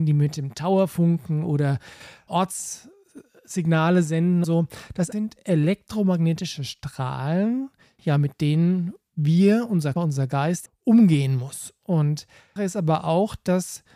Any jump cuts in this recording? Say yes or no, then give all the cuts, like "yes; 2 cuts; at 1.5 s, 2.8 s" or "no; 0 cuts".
yes; 7 cuts; at 2.3 s, 4.4 s, 5.1 s, 8.0 s, 10.0 s, 10.7 s, 12.6 s